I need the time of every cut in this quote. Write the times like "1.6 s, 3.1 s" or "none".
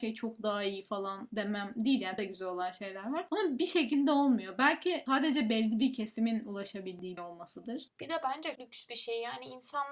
2.2 s, 7.2 s, 8.6 s